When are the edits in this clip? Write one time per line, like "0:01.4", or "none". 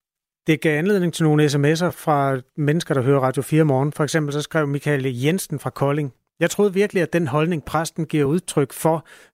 none